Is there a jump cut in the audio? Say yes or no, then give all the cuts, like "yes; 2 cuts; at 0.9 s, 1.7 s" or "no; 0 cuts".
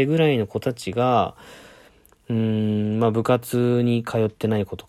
no; 0 cuts